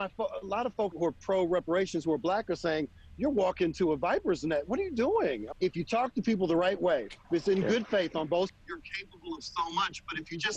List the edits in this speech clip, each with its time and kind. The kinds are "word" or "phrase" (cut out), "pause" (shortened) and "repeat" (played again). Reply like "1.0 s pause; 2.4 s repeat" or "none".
0.9 s word; 5.5 s word; 7.2 s pause; 8.5 s word